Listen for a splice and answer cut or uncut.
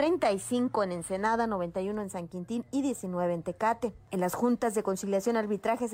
uncut